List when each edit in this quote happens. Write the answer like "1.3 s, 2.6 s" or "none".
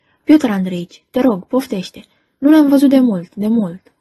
none